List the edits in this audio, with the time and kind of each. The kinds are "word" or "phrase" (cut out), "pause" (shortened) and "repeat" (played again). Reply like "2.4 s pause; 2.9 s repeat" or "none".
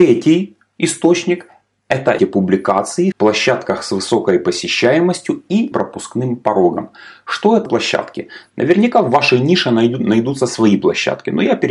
2.2 s word; 3.1 s phrase; 5.7 s word; 7.7 s word